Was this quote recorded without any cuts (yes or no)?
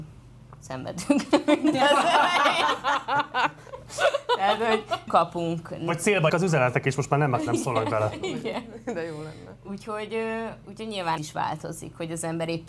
no